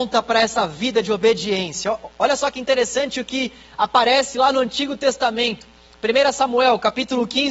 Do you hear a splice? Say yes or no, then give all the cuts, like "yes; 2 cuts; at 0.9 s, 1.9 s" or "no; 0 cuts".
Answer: no; 0 cuts